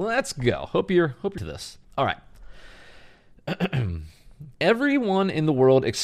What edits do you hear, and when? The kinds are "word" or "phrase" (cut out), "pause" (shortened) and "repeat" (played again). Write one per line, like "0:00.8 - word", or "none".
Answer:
0:01.4 - word
0:01.8 - pause
0:04.5 - pause